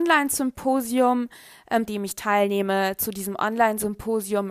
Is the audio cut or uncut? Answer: cut